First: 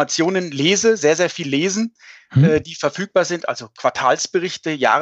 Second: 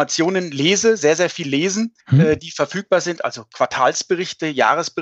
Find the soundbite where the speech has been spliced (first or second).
second